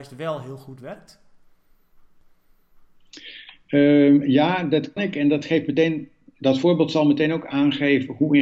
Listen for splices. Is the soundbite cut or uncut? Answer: cut